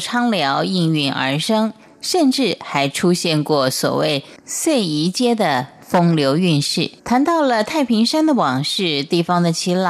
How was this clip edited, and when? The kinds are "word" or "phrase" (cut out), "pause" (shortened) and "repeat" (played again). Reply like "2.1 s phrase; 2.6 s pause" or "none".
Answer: 7.0 s pause